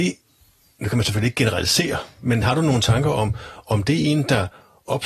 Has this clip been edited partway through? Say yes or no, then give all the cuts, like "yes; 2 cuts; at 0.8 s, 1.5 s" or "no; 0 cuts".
no; 0 cuts